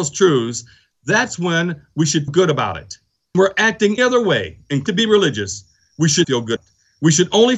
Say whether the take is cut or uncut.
cut